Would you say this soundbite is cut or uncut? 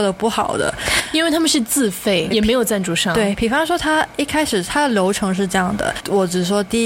cut